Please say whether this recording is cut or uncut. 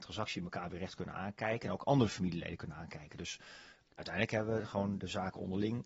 uncut